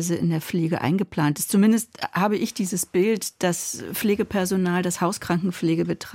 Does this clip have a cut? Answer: no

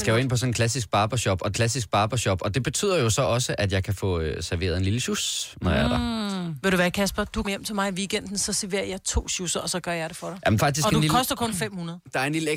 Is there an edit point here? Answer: yes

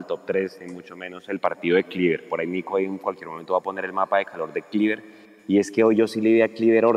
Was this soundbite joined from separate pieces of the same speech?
no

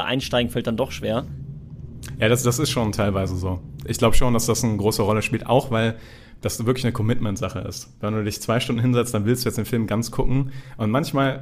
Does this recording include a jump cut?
no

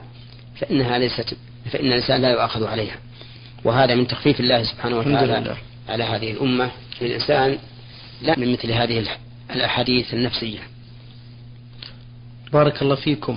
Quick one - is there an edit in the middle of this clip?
yes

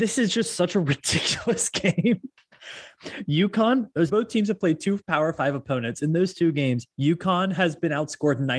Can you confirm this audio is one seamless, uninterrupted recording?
no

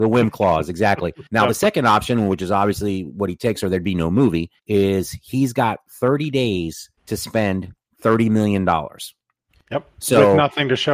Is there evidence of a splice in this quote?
yes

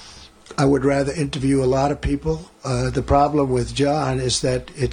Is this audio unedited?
yes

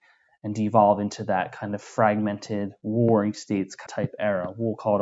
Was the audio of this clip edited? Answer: yes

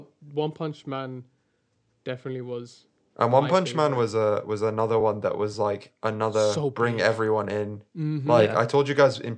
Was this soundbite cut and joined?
no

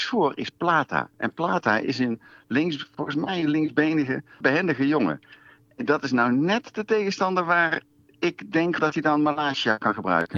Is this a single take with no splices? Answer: no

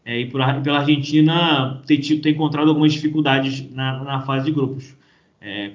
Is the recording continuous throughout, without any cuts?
yes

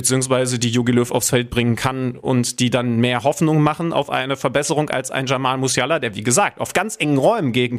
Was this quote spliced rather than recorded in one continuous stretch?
no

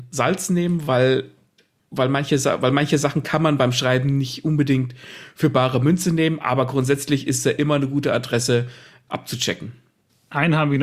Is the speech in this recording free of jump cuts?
yes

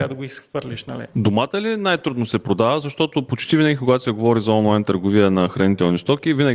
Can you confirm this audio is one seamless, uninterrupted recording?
yes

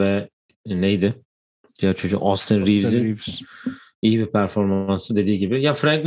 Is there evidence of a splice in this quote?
no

